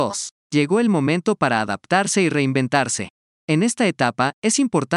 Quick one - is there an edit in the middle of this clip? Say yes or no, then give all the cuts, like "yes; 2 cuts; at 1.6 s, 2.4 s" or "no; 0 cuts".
no; 0 cuts